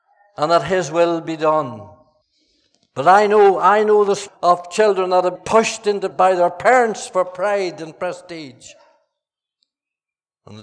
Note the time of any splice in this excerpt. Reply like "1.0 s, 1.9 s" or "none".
2.2 s, 4.3 s, 5.3 s, 6.1 s

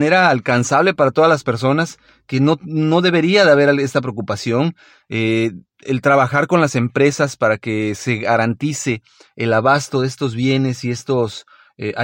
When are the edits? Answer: none

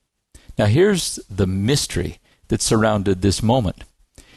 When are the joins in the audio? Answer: none

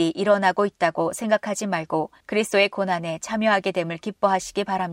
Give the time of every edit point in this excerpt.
2.2 s

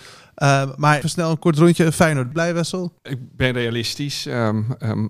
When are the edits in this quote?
1.0 s, 2.3 s, 3.0 s

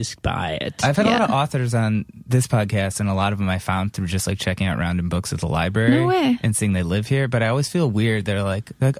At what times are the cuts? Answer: none

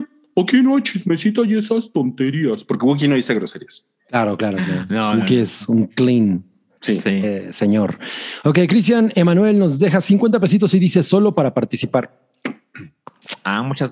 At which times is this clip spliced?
4.0 s

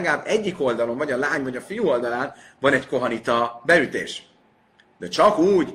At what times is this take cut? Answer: none

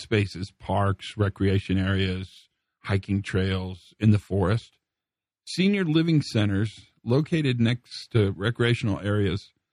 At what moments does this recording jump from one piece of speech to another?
none

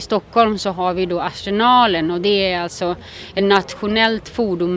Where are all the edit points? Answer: none

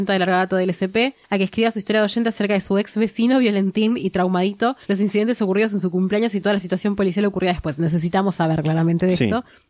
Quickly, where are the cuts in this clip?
1.2 s, 4.8 s

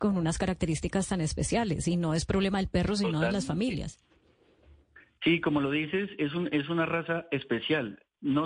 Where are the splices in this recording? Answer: none

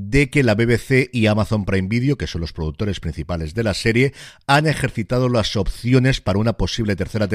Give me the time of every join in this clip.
none

